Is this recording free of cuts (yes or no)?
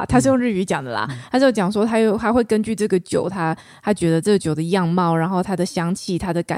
yes